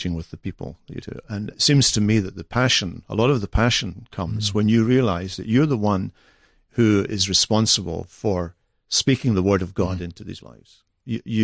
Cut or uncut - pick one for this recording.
cut